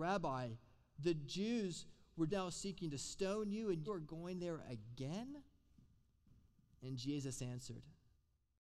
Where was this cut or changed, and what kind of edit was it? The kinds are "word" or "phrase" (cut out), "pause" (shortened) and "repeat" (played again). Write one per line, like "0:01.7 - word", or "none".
0:02.3 - word
0:03.9 - word